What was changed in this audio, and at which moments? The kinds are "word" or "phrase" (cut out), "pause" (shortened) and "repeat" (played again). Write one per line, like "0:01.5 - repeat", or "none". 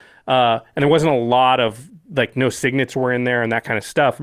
none

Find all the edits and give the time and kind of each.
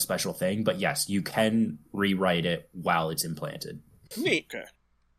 none

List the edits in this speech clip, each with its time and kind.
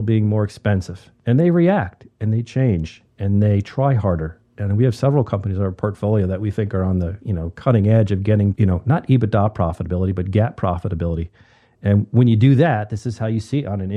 0:08.5 - word

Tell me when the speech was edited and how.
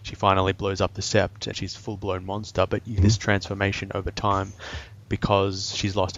0:01.5 - word
0:03.0 - word

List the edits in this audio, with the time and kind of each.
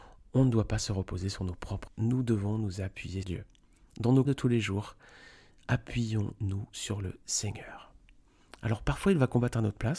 0:01.9 - word
0:03.2 - word
0:04.3 - word

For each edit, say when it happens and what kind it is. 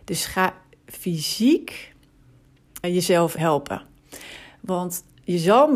0:02.8 - word
0:03.4 - word

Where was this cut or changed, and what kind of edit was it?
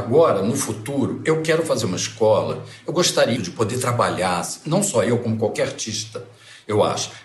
0:03.4 - word

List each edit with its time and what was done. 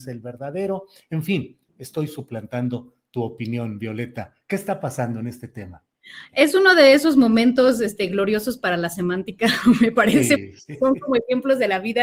0:01.7 - pause

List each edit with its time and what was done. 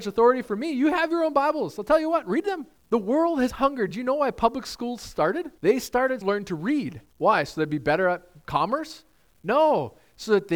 0:02.8 - pause
0:03.5 - word
0:05.6 - pause
0:06.2 - phrase
0:07.1 - pause

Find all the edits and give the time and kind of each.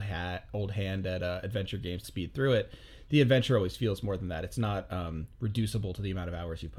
0:02.0 - phrase

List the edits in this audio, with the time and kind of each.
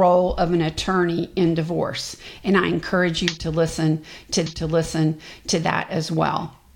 0:04.5 - repeat

